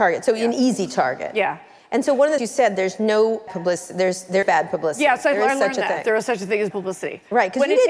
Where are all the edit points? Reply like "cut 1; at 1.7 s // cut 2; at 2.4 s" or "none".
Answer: cut 1; at 2.4 s // cut 2; at 3.5 s // cut 3; at 4.4 s // cut 4; at 6.7 s